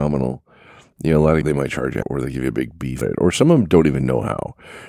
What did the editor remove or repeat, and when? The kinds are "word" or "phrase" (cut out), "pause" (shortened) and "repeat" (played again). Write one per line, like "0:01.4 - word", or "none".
0:01.4 - word
0:02.0 - word
0:03.0 - word